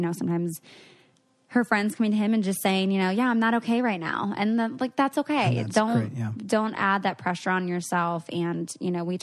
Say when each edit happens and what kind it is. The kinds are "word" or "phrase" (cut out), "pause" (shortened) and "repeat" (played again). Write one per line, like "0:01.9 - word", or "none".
none